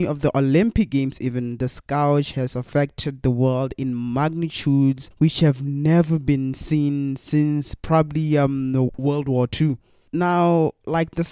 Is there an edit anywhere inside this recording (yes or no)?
no